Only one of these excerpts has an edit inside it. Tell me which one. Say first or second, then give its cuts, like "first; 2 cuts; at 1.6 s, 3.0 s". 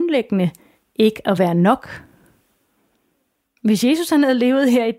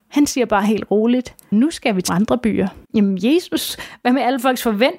second; 3 cuts; at 1.5 s, 2.1 s, 2.8 s